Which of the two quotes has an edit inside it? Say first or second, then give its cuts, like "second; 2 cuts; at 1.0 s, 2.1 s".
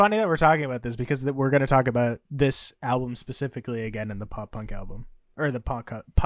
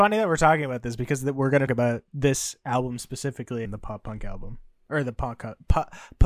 second; 2 cuts; at 1.7 s, 3.6 s